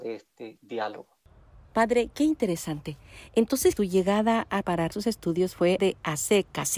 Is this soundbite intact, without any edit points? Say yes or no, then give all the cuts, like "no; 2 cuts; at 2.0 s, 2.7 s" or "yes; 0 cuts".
no; 4 cuts; at 3.8 s, 4.6 s, 4.9 s, 5.8 s